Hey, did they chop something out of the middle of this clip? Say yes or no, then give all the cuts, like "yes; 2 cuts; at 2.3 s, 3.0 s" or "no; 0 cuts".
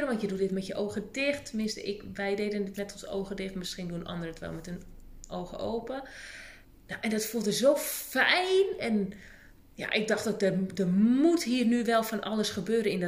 yes; 2 cuts; at 6.6 s, 9.6 s